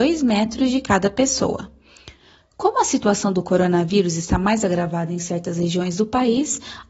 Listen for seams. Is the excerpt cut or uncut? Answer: uncut